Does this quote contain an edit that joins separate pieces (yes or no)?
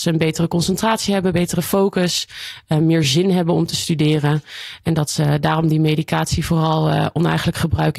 no